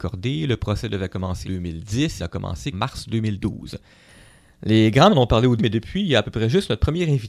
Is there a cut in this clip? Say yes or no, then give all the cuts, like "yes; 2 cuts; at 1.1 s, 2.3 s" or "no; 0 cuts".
yes; 5 cuts; at 1.4 s, 2.2 s, 2.7 s, 5.1 s, 5.6 s